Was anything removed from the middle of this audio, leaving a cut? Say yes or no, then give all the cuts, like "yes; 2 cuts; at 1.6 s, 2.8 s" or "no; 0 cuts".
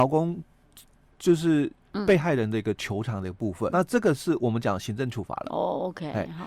yes; 1 cut; at 3.7 s